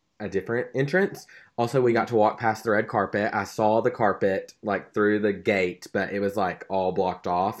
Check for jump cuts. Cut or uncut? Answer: uncut